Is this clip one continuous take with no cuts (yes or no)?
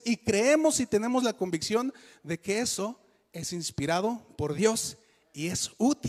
yes